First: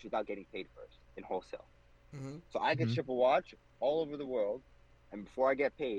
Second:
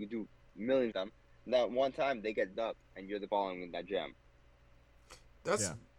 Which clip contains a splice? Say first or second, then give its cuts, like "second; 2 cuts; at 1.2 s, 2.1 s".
second; 4 cuts; at 0.9 s, 2.5 s, 2.8 s, 3.3 s